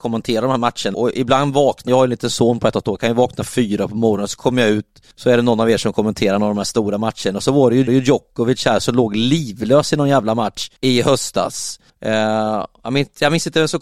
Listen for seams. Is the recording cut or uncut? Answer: cut